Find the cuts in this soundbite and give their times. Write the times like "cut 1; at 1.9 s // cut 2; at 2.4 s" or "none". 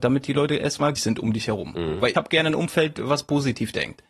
cut 1; at 1.0 s // cut 2; at 2.1 s